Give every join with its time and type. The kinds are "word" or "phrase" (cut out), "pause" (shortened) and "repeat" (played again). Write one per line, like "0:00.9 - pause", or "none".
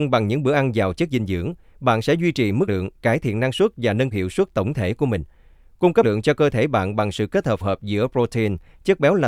0:02.7 - word
0:04.1 - word
0:06.0 - word
0:07.6 - word